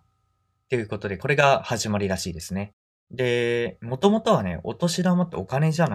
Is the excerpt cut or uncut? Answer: uncut